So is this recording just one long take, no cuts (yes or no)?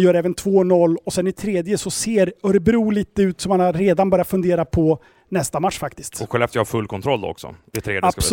yes